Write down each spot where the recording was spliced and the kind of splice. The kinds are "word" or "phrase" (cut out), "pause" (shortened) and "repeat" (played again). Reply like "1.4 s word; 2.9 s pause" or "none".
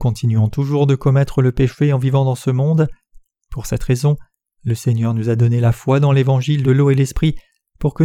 none

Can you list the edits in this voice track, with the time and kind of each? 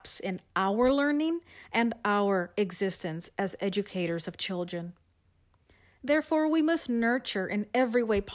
none

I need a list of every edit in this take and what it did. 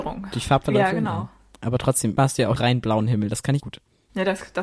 2.2 s word; 2.6 s word; 3.6 s word

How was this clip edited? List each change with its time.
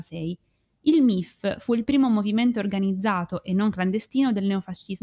none

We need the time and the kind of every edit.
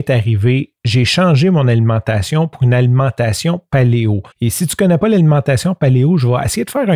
4.3 s pause

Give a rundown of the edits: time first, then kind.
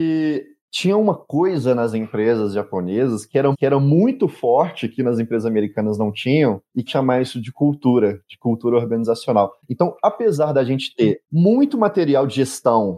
3.5 s repeat; 6.9 s phrase; 9.6 s pause

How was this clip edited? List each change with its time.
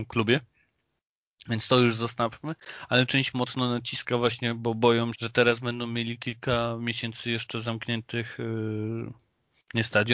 3.3 s word; 5.1 s word

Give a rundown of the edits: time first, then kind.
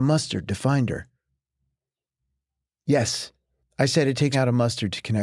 3.6 s pause; 4.3 s word

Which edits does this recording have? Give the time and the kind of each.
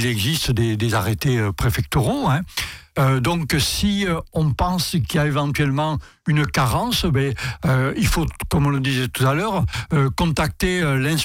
none

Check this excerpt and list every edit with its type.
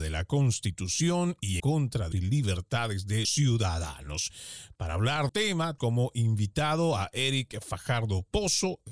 1.6 s word; 2.1 s phrase; 3.2 s word; 5.3 s phrase; 5.8 s word

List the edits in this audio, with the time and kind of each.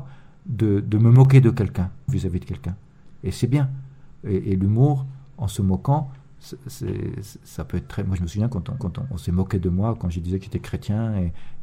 2.1 s phrase; 8.8 s repeat

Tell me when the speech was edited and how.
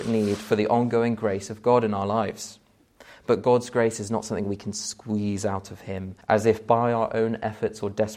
6.2 s pause

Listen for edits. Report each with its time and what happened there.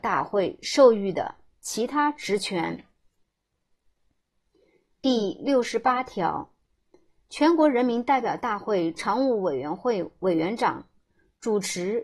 none

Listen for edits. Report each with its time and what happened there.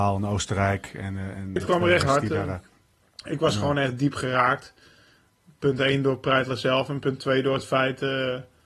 1.6 s word; 2.0 s word

